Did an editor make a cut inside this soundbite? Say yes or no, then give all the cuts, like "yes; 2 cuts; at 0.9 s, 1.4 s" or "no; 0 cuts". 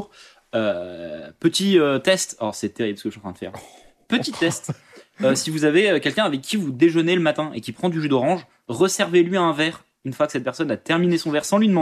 no; 0 cuts